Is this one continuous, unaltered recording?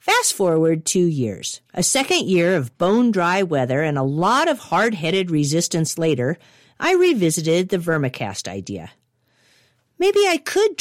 no; 1 cut; at 1.7 s

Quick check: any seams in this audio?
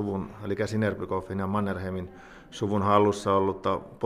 no; 0 cuts

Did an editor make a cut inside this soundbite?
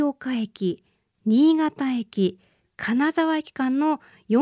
no; 0 cuts

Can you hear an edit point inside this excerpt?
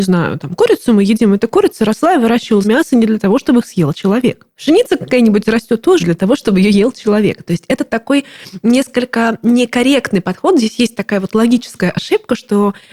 yes; 2 cuts; at 2.6 s, 6.0 s

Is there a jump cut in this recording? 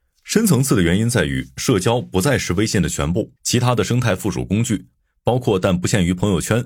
yes; 1 cut; at 3.4 s

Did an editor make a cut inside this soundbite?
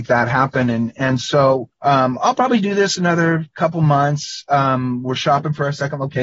yes; 1 cut; at 1.7 s

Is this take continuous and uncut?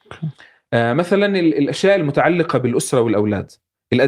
yes; 0 cuts

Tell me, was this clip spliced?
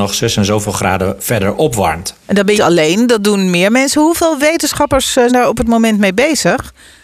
yes; 3 cuts; at 2.2 s, 2.6 s, 5.3 s

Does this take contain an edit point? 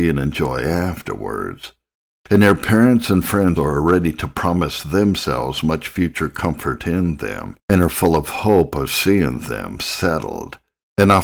yes; 2 cuts; at 3.6 s, 7.6 s

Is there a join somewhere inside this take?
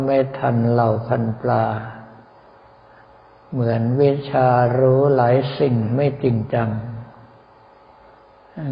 no; 0 cuts

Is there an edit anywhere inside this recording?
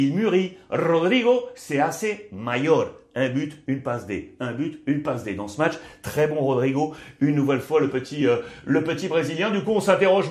no; 0 cuts

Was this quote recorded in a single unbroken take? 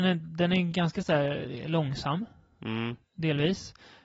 yes; 0 cuts

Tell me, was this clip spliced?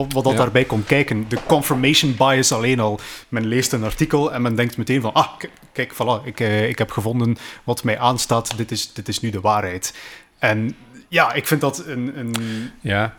no; 0 cuts

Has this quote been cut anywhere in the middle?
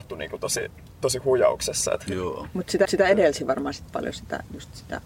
yes; 2 cuts; at 2.9 s, 3.9 s

